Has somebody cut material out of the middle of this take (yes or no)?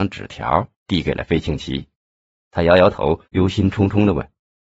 yes